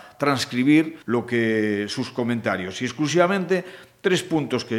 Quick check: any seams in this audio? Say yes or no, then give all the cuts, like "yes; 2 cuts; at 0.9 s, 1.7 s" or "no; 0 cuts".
yes; 1 cut; at 1.0 s